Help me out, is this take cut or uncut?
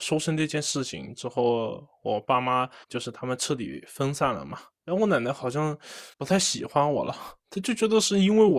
cut